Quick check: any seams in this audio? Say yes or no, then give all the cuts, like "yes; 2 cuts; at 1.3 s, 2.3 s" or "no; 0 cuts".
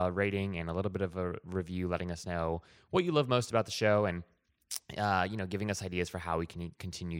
no; 0 cuts